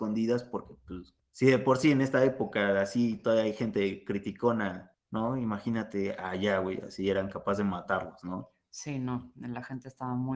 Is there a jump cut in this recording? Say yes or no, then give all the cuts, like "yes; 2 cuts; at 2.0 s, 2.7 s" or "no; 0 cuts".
no; 0 cuts